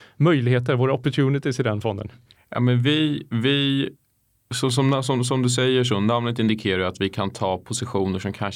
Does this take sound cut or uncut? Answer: uncut